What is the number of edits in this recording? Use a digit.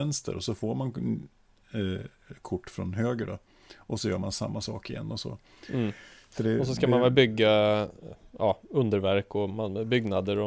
0